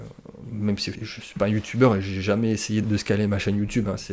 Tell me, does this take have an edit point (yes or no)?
yes